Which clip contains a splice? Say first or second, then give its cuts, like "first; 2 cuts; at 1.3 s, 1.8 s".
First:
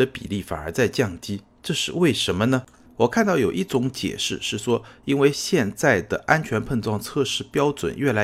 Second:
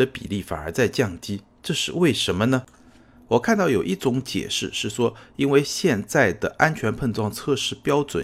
first; 1 cut; at 2.9 s